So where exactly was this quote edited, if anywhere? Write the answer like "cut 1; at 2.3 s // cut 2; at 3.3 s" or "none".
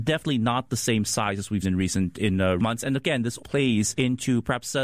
cut 1; at 1.6 s // cut 2; at 2.6 s // cut 3; at 3.4 s